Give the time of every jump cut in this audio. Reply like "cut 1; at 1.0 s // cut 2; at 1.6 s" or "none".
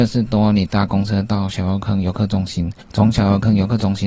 cut 1; at 2.8 s